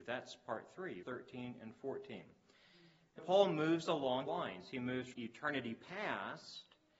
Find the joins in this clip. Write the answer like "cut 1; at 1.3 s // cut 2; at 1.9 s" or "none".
cut 1; at 1.0 s // cut 2; at 3.2 s // cut 3; at 4.3 s // cut 4; at 5.1 s